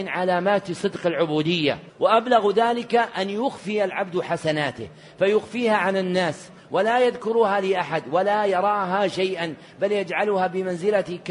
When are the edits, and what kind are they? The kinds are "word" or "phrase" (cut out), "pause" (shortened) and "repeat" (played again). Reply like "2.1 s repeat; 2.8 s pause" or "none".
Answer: 1.9 s pause